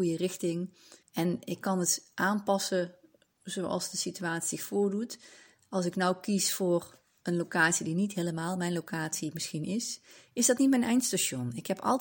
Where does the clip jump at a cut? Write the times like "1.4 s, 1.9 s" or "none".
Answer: 1.0 s